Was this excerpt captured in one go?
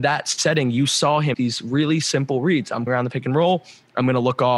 no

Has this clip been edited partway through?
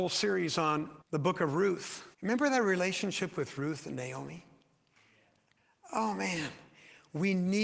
yes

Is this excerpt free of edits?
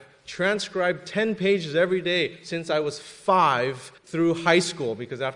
no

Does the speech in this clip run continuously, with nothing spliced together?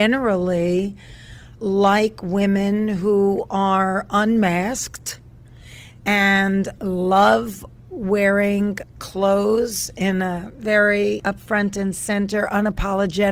yes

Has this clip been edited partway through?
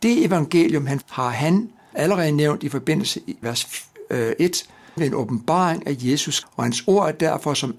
yes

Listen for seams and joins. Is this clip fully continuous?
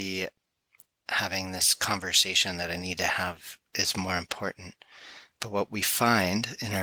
yes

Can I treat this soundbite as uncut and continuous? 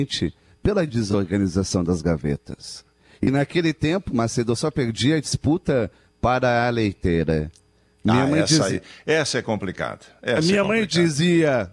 yes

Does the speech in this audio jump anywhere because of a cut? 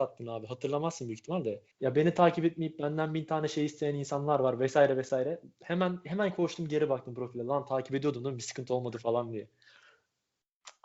yes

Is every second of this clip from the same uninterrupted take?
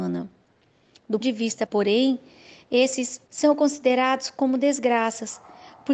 no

